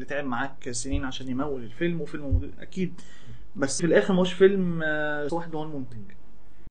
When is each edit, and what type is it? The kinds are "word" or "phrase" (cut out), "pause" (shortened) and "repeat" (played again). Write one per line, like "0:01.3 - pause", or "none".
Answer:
0:03.8 - word
0:05.3 - word